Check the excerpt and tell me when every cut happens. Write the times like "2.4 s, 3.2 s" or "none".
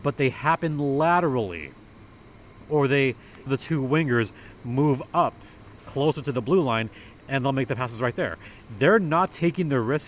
3.5 s